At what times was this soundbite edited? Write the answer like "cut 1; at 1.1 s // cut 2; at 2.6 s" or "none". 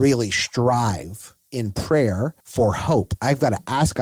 cut 1; at 2.4 s